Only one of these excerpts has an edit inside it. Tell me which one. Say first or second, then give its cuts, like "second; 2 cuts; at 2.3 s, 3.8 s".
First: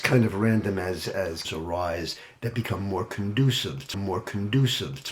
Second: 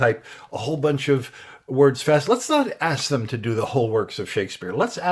first; 2 cuts; at 1.4 s, 3.9 s